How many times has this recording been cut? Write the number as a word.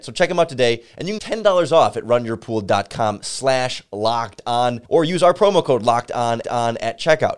three